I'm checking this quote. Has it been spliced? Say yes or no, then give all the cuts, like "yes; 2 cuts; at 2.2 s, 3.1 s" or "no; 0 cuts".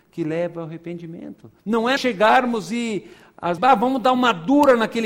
yes; 3 cuts; at 1.6 s, 2.0 s, 3.6 s